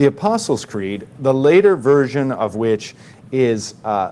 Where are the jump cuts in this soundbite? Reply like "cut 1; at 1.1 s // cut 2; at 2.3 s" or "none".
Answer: none